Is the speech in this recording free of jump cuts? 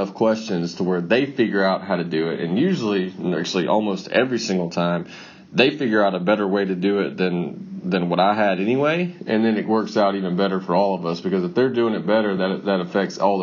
yes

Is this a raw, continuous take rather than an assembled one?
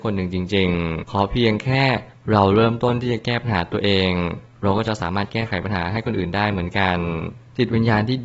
no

